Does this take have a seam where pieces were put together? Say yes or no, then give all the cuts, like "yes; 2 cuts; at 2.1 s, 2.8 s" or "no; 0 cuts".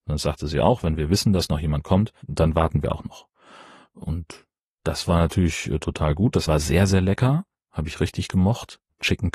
yes; 1 cut; at 6.5 s